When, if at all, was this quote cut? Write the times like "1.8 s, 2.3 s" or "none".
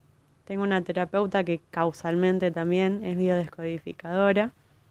1.6 s